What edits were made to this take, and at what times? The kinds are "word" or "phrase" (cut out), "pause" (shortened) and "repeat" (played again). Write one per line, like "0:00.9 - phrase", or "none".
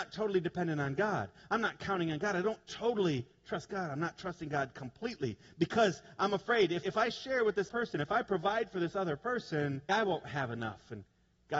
0:06.8 - word
0:07.7 - word
0:09.9 - word